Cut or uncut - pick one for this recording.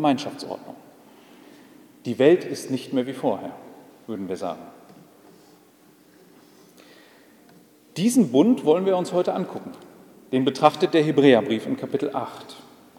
uncut